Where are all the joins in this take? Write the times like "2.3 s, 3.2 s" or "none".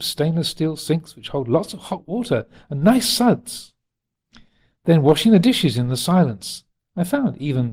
none